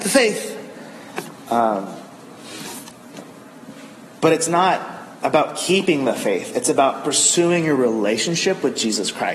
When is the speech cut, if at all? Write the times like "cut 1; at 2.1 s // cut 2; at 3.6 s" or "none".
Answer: none